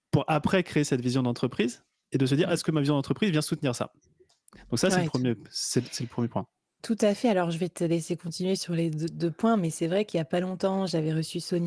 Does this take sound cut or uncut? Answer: uncut